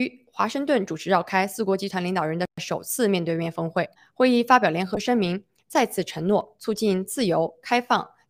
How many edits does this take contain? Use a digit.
1